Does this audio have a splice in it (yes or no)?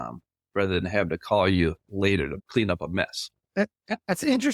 yes